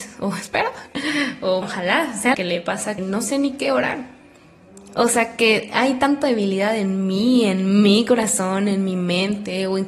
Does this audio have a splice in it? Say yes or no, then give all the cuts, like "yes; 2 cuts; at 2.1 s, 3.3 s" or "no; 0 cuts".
yes; 3 cuts; at 1.6 s, 2.3 s, 3.0 s